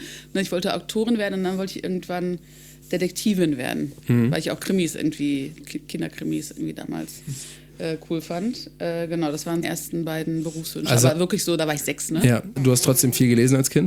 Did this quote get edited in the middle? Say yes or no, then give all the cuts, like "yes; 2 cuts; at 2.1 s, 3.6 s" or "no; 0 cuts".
yes; 4 cuts; at 2.8 s, 5.6 s, 9.6 s, 12.6 s